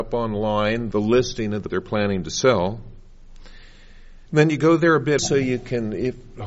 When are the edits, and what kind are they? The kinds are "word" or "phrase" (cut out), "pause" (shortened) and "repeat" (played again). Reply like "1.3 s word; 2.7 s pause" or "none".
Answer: 0.9 s word; 1.7 s word; 4.3 s pause; 5.2 s word